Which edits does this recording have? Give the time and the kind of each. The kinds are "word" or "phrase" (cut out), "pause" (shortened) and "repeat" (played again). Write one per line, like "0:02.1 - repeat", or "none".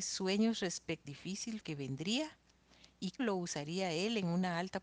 0:01.0 - word
0:01.6 - word
0:03.2 - word